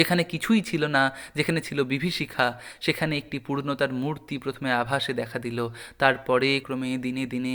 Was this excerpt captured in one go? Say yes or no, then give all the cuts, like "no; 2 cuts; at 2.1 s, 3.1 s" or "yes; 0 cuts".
no; 1 cut; at 6.6 s